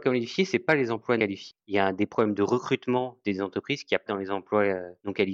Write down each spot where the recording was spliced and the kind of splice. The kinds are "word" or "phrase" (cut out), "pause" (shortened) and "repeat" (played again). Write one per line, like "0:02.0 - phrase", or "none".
0:01.2 - word
0:03.2 - word
0:04.1 - word